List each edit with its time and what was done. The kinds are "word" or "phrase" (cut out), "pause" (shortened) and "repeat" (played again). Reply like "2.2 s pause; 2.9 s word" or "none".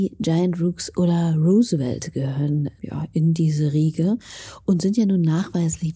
2.8 s word